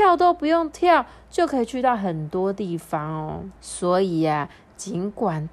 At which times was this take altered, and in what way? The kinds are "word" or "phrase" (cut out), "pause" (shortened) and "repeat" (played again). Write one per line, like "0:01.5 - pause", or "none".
0:03.6 - pause